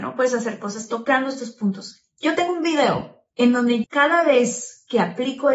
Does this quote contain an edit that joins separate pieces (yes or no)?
yes